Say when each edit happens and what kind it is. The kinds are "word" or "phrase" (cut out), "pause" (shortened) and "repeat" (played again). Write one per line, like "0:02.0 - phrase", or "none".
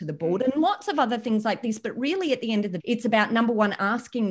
0:02.8 - word